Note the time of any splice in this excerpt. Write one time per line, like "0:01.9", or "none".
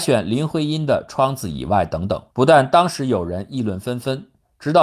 0:02.3